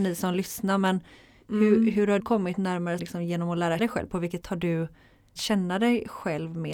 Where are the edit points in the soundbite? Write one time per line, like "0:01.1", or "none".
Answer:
0:02.2
0:03.0
0:03.8
0:04.4
0:05.4